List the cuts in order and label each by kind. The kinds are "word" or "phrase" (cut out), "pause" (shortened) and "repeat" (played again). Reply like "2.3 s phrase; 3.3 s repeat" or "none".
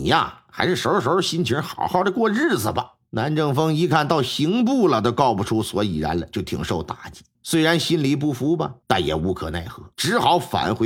3.1 s pause; 7.3 s pause; 8.8 s pause; 9.9 s pause